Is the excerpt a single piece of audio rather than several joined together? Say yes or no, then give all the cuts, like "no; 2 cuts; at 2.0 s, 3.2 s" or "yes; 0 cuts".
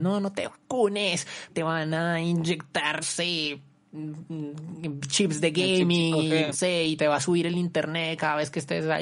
no; 3 cuts; at 1.5 s, 3.0 s, 6.5 s